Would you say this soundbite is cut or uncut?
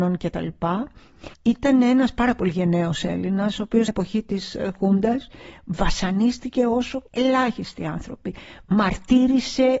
cut